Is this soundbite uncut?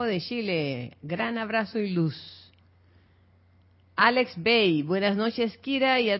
yes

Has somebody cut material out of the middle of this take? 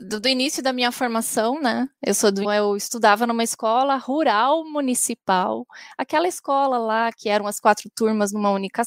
yes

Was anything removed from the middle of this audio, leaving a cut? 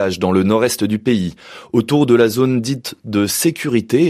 no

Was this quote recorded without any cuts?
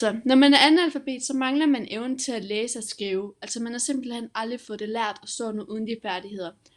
yes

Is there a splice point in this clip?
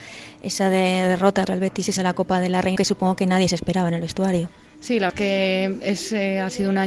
yes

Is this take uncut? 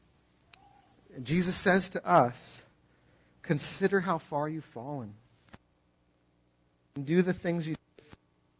yes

